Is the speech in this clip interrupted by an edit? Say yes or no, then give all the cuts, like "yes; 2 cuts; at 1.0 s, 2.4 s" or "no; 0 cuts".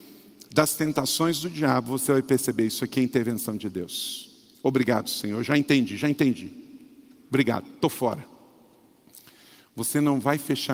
yes; 1 cut; at 7.7 s